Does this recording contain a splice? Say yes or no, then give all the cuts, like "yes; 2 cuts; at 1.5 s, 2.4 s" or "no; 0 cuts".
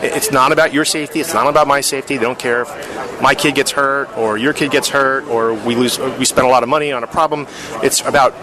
no; 0 cuts